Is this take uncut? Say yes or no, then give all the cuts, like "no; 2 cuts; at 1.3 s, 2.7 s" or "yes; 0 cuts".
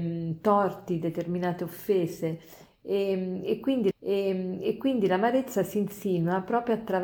no; 1 cut; at 3.9 s